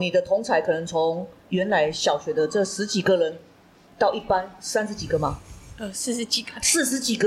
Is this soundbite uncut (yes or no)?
yes